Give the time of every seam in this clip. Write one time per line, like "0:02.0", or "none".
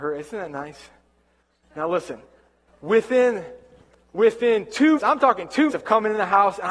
0:05.0
0:05.7